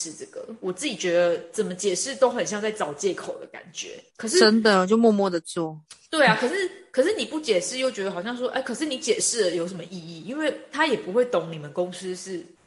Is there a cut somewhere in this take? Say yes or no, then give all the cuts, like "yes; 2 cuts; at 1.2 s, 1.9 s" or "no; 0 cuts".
yes; 1 cut; at 4.1 s